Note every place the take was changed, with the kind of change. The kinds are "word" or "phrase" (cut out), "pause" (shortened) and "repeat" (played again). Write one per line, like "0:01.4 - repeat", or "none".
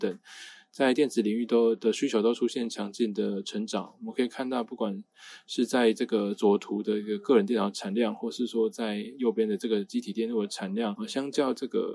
0:11.0 - word